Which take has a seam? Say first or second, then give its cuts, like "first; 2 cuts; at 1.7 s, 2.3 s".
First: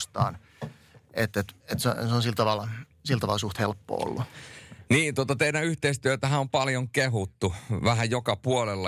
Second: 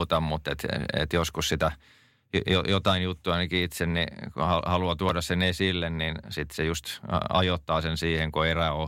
first; 1 cut; at 1.6 s